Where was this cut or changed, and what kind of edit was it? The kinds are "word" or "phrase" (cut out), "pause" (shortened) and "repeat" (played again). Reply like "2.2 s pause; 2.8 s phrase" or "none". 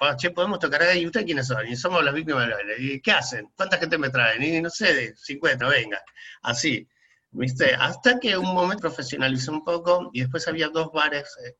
5.6 s word; 8.8 s word